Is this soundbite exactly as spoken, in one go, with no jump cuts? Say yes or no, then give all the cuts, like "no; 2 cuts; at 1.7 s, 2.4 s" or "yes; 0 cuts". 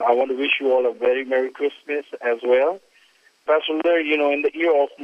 yes; 0 cuts